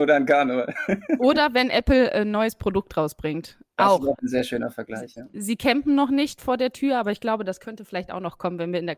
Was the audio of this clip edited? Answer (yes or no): no